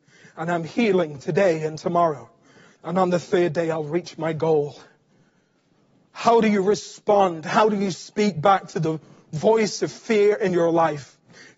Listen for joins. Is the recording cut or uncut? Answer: uncut